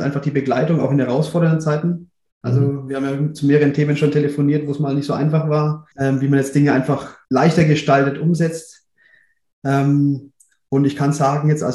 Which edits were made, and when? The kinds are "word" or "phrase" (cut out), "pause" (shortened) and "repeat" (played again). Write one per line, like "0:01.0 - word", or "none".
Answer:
0:05.9 - pause
0:07.2 - pause

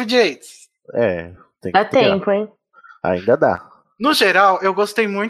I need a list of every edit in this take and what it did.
none

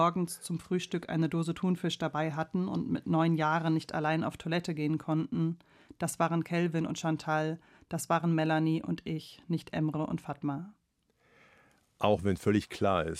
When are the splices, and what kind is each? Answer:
none

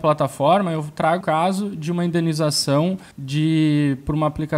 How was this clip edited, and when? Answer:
0:01.2 - word
0:03.1 - pause

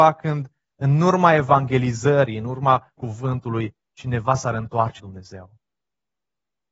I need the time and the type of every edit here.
0:03.0 - word
0:05.0 - word

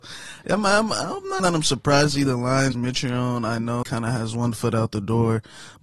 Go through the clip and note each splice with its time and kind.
0:01.4 - word
0:02.2 - word
0:02.7 - phrase
0:03.8 - word

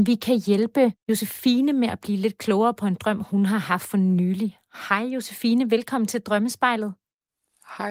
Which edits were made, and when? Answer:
none

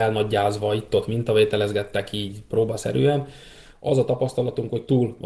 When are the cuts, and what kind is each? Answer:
none

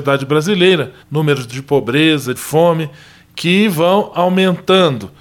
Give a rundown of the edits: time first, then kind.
0:01.0 - pause
0:02.3 - phrase

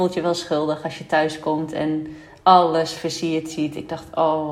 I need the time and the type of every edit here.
none

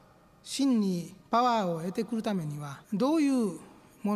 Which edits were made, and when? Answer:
0:01.2 - pause
0:02.8 - pause

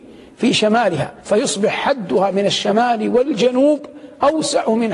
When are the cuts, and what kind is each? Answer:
0:01.2 - pause

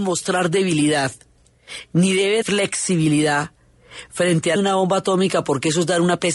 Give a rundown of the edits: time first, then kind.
0:02.4 - phrase
0:04.6 - phrase

